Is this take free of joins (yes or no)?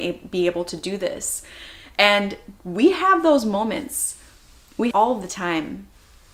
no